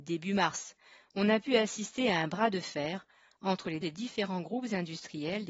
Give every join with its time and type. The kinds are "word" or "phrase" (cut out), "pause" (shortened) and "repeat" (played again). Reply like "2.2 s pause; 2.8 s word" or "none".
3.8 s word